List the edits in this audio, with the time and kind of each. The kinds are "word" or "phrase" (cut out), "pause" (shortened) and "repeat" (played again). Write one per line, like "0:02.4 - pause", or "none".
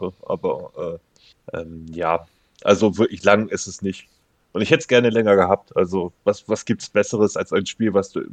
0:01.3 - pause
0:06.2 - pause

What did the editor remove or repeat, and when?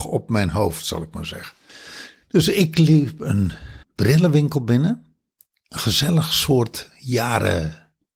0:03.8 - pause

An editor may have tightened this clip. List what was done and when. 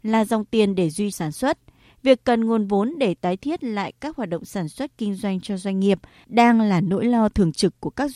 0:01.1 - word

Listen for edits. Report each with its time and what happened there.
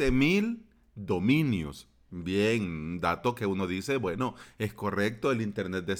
none

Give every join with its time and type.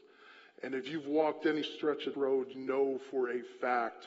0:02.1 - word
0:02.5 - word

